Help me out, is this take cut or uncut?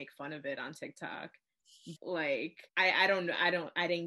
cut